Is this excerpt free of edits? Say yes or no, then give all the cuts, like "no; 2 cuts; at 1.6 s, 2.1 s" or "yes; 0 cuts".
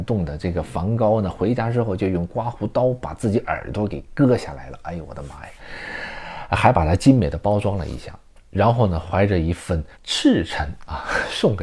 no; 1 cut; at 9.9 s